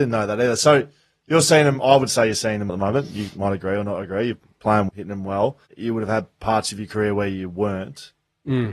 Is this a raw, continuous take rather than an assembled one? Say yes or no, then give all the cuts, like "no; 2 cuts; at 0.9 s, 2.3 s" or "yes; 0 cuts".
no; 3 cuts; at 2.7 s, 4.9 s, 5.7 s